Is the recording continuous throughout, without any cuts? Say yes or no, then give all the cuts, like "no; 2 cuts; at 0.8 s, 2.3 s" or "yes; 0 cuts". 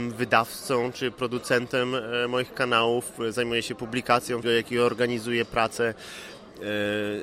no; 1 cut; at 4.4 s